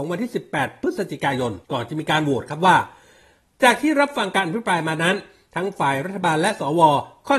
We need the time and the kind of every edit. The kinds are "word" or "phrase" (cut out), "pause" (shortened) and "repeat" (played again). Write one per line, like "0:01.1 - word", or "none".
0:01.6 - pause